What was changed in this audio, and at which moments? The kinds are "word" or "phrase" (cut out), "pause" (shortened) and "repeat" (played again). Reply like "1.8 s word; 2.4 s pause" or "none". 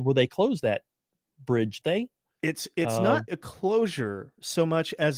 1.8 s word; 3.3 s word